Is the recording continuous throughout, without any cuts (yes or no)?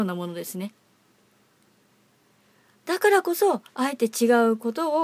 no